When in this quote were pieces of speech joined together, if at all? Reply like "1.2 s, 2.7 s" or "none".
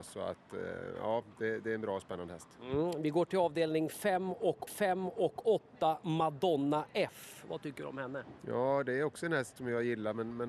4.7 s